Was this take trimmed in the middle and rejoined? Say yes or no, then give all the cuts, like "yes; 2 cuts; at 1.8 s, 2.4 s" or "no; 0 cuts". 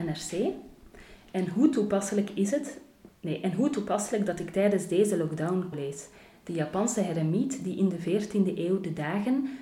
yes; 1 cut; at 5.7 s